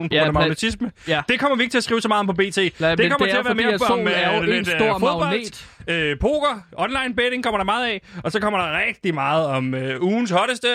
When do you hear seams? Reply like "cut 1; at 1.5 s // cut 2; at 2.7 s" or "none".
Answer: none